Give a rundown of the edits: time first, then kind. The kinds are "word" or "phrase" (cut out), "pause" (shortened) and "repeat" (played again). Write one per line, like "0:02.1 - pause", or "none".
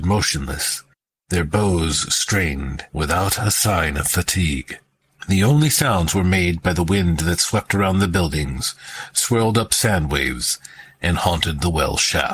0:05.0 - pause